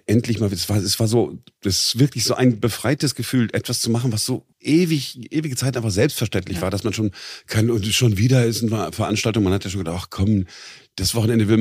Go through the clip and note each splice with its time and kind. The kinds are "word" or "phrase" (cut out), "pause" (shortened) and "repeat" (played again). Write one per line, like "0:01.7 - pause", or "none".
0:04.5 - pause